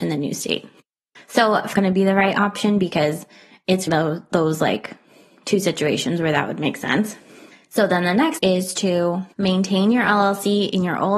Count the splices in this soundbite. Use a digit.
4